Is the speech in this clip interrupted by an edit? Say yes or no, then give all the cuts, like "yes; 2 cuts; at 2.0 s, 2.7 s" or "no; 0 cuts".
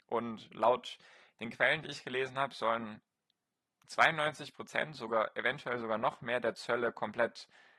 no; 0 cuts